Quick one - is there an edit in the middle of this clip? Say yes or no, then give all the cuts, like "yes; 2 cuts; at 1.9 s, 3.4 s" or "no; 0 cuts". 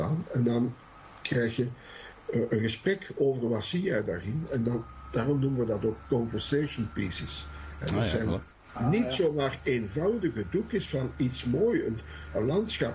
no; 0 cuts